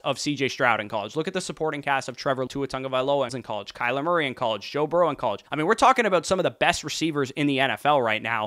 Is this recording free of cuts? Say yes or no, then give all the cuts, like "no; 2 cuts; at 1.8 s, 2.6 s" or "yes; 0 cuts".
no; 3 cuts; at 2.5 s, 3.3 s, 5.5 s